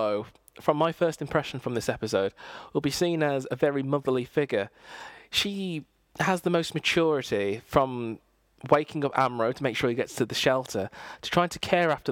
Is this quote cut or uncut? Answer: uncut